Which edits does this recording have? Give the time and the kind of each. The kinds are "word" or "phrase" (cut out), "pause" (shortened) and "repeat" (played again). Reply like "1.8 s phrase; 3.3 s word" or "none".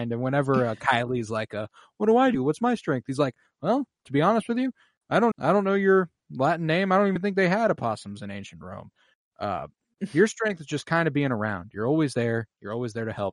5.3 s word